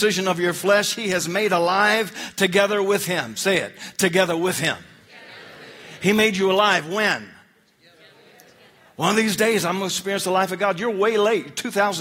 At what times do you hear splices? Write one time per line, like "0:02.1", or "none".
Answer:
none